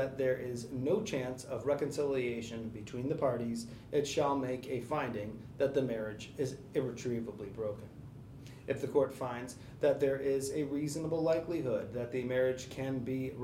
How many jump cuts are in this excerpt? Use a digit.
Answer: 0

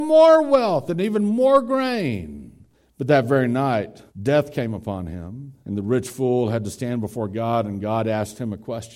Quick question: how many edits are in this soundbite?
3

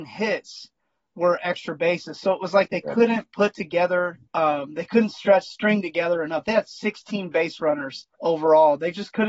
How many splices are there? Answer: 2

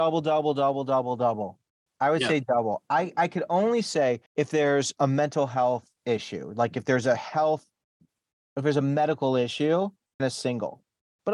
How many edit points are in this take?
4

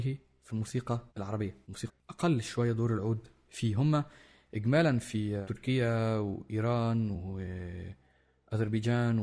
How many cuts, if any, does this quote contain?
1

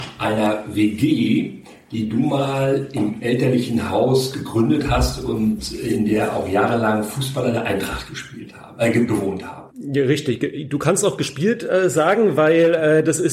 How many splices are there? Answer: 1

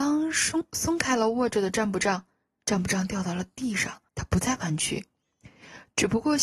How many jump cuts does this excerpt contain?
1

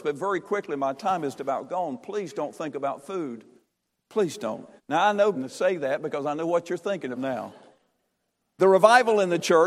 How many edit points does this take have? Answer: 4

